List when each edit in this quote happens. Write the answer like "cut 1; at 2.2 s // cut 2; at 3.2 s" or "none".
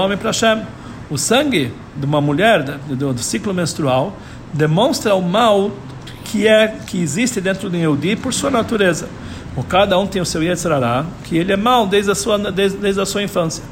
none